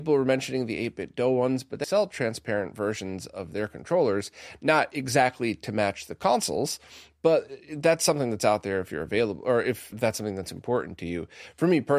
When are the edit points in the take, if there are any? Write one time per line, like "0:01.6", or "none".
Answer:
0:01.8
0:09.9